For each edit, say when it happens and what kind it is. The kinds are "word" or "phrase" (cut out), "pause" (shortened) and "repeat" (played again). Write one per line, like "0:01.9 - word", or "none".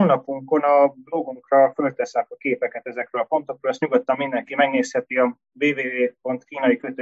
none